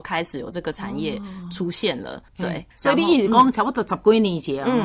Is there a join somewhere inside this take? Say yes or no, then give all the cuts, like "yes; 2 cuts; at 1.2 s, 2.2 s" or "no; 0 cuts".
yes; 2 cuts; at 2.3 s, 2.7 s